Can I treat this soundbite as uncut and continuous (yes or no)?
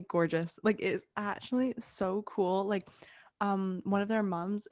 yes